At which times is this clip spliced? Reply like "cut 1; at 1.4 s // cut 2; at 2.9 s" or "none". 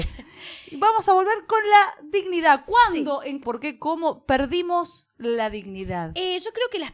cut 1; at 3.4 s